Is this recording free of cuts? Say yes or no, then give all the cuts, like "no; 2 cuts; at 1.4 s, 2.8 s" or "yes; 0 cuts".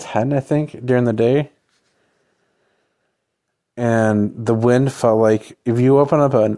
yes; 0 cuts